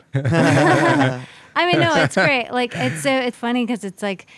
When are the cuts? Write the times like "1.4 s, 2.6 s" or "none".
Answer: 3.3 s